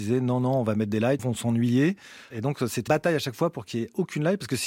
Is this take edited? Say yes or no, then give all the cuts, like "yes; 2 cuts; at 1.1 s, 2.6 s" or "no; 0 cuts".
yes; 3 cuts; at 1.2 s, 2.3 s, 2.9 s